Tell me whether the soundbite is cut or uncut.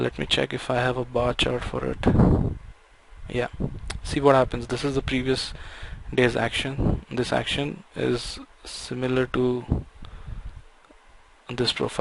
uncut